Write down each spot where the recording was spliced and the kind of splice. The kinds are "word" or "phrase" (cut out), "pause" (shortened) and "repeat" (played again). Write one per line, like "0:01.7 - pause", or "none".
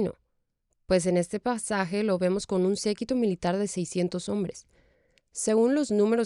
none